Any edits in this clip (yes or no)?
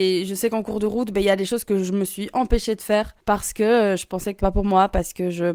yes